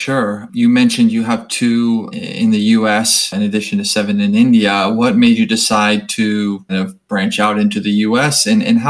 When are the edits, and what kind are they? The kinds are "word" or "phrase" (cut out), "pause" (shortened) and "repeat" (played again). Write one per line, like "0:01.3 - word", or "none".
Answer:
0:02.1 - word
0:06.7 - word